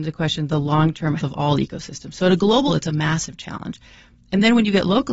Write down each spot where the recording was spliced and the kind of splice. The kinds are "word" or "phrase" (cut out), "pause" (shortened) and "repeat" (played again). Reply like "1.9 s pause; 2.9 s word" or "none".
1.2 s word; 2.7 s word